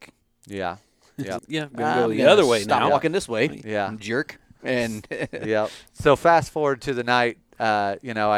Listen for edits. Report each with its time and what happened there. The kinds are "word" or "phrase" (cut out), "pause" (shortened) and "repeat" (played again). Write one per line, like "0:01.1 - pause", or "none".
0:01.4 - word
0:05.9 - pause